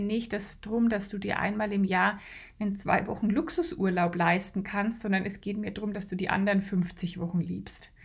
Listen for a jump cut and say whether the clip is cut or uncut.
uncut